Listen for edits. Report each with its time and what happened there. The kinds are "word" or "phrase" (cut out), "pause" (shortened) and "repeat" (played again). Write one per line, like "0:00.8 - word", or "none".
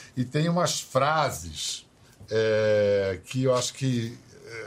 none